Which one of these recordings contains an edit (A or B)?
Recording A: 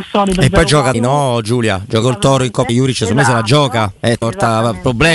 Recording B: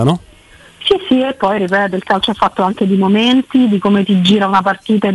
A